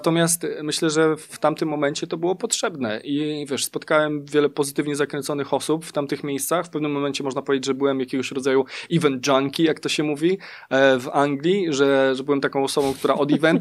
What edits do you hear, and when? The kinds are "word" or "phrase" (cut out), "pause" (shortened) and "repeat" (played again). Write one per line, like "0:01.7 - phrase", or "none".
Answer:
none